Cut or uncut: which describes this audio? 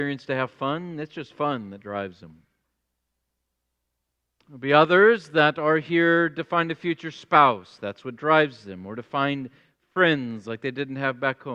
uncut